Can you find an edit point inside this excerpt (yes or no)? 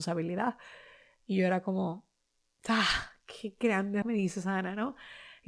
yes